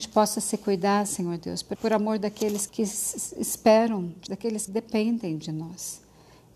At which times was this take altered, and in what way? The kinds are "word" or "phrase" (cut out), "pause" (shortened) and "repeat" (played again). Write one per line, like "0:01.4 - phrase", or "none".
0:01.7 - word
0:02.7 - word
0:04.3 - word
0:04.7 - word